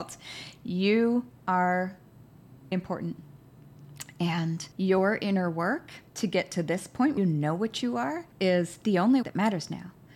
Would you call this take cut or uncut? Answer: cut